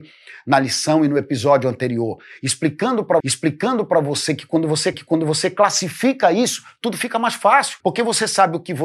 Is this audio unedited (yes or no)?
no